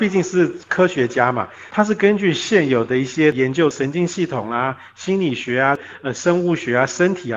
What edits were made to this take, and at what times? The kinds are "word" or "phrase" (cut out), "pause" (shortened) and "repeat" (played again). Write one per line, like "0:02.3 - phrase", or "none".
none